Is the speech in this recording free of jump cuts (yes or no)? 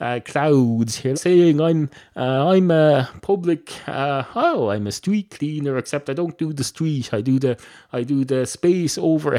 no